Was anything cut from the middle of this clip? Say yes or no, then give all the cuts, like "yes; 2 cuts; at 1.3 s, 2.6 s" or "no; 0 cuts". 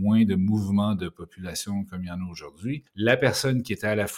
no; 0 cuts